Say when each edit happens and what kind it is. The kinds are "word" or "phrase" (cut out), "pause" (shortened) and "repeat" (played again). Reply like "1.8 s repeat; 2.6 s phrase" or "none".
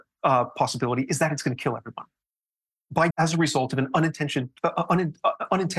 3.1 s word